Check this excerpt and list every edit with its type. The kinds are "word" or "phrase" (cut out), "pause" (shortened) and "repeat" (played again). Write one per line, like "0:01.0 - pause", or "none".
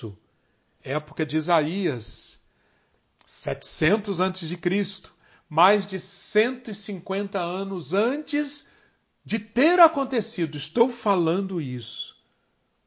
none